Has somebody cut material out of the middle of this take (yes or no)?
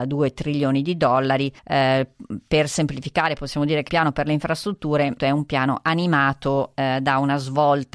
yes